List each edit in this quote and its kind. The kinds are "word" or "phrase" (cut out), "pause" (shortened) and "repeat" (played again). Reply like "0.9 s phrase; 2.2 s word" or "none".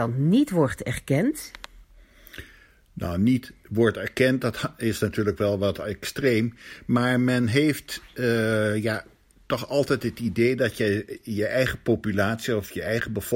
none